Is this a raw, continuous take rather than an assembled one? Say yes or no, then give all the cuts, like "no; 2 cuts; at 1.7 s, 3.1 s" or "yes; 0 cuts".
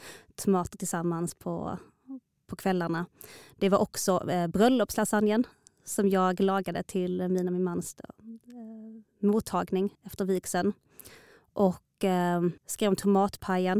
no; 2 cuts; at 9.9 s, 12.6 s